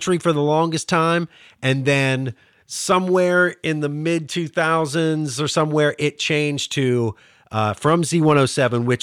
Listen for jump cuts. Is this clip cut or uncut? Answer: uncut